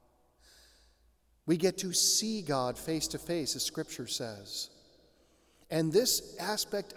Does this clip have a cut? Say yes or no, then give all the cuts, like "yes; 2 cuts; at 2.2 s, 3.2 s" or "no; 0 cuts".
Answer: no; 0 cuts